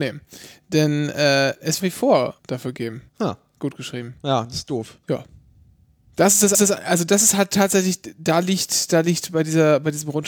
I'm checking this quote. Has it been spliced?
yes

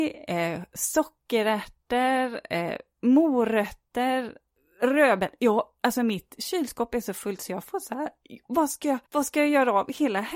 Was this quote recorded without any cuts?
no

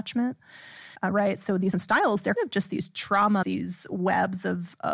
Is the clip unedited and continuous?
no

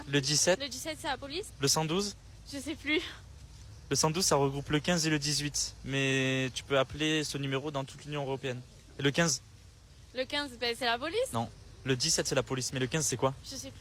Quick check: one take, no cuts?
yes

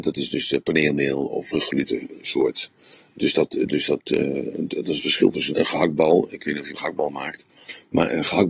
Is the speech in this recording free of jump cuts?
no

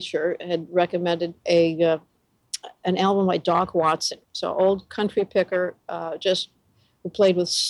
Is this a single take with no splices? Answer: no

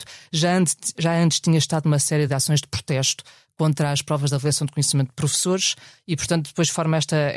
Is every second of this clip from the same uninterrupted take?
yes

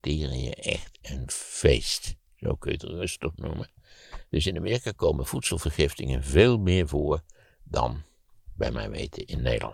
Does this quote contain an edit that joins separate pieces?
no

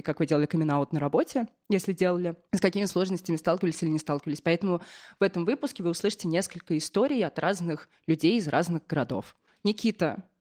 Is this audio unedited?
yes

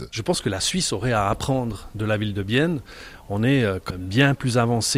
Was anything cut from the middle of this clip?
yes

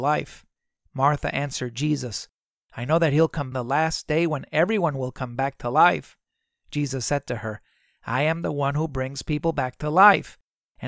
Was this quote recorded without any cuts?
no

